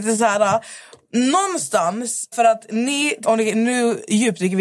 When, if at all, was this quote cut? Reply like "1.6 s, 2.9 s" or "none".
2.3 s, 3.2 s